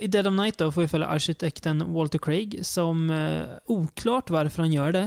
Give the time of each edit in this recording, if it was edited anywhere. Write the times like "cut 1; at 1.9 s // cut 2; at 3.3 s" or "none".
cut 1; at 3.6 s